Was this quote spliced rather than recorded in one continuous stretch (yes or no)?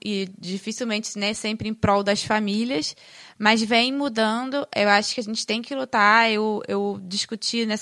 no